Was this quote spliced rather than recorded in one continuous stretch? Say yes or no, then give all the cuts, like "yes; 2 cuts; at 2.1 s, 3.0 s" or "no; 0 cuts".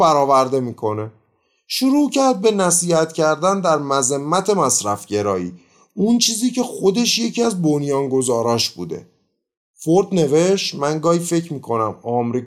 no; 0 cuts